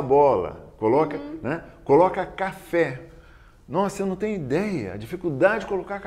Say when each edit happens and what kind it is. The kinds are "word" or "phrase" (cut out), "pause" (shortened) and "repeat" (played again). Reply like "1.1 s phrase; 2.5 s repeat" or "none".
none